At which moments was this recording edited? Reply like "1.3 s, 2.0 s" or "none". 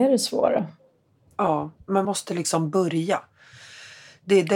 2.0 s